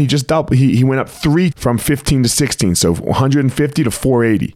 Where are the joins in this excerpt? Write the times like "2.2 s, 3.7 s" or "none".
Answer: 1.5 s